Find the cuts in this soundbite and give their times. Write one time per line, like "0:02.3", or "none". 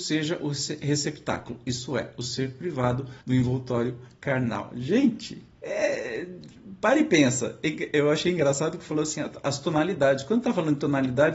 0:03.2
0:05.5

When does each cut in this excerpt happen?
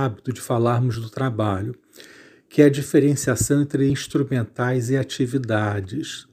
none

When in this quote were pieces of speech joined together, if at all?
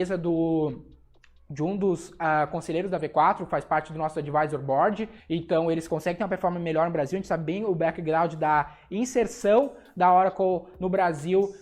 0:05.2

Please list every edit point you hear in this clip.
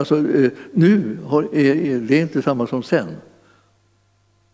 none

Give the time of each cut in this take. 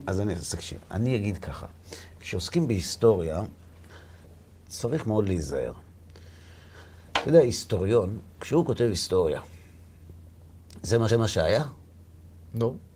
0:11.1

